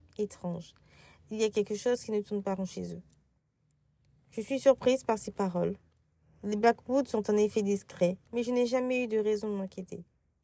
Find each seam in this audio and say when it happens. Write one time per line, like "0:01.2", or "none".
0:08.3